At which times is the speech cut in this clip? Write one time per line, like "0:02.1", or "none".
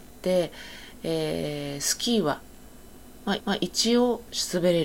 0:03.4

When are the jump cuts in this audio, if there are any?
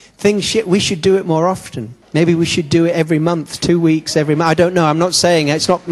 0:02.0

